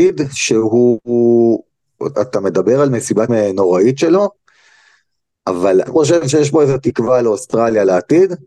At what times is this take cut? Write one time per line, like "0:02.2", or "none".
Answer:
0:02.1
0:03.3
0:05.9